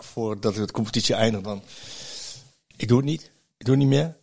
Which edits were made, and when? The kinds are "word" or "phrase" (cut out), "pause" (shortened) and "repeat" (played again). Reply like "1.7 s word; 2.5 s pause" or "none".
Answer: 1.4 s word